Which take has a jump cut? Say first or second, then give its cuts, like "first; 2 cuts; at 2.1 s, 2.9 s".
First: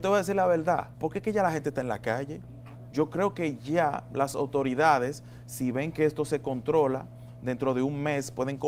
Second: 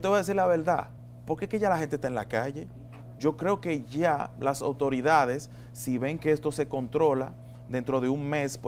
first; 1 cut; at 0.9 s